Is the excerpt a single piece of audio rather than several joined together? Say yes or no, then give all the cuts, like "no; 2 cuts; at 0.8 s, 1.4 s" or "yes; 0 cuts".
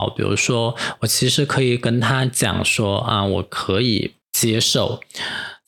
no; 1 cut; at 4.2 s